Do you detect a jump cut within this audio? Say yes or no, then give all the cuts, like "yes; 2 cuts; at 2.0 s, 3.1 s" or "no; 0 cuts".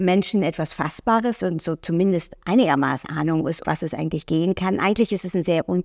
yes; 3 cuts; at 1.4 s, 3.0 s, 3.6 s